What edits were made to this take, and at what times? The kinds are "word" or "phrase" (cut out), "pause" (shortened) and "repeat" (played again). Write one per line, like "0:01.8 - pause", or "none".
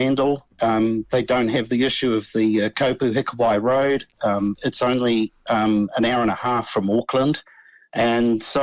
none